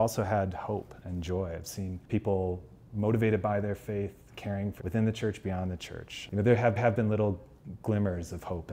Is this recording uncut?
no; 2 cuts; at 4.8 s, 6.8 s

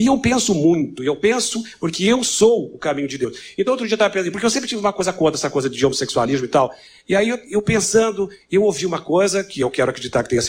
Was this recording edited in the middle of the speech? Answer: no; 0 cuts

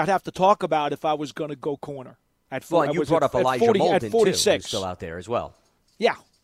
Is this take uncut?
yes; 0 cuts

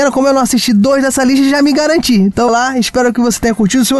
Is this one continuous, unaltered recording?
no; 1 cut; at 2.5 s

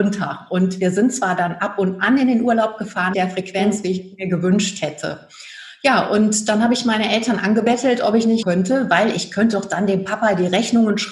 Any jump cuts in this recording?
yes; 2 cuts; at 3.1 s, 8.4 s

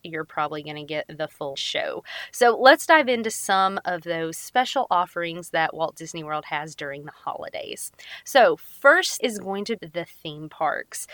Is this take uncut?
no; 3 cuts; at 1.5 s, 9.2 s, 9.8 s

